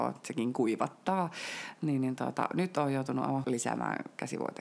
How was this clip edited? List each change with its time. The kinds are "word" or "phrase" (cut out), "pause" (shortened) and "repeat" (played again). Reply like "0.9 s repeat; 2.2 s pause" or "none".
3.4 s word

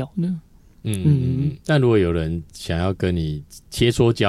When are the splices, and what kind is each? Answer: 1.6 s pause

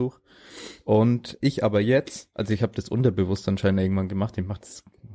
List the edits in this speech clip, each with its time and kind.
1.4 s word

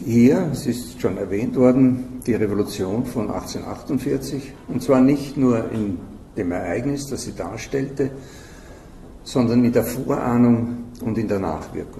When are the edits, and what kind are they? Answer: none

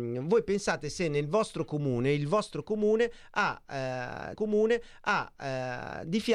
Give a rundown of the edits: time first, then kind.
4.3 s repeat

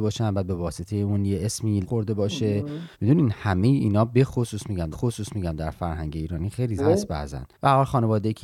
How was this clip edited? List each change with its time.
1.8 s phrase; 2.9 s pause; 4.9 s repeat; 6.8 s phrase; 7.5 s pause

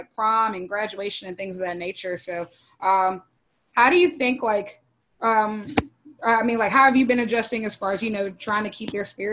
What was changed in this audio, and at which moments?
none

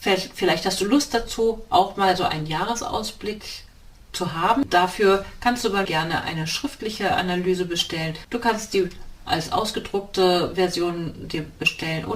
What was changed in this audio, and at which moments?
5.8 s word

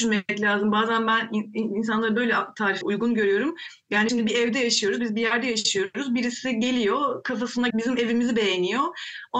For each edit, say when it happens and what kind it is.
2.8 s word; 4.1 s word; 7.7 s word

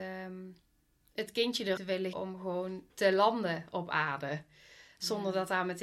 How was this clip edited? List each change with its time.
1.8 s word; 2.1 s word

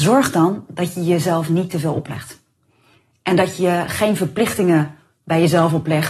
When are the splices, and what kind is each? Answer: none

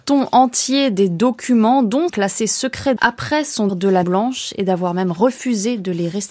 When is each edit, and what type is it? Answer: 2.1 s word; 3.0 s word; 3.7 s word; 4.0 s word

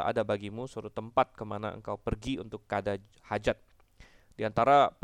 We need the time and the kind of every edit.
none

